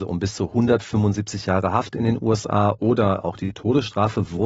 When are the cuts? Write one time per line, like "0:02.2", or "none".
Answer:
none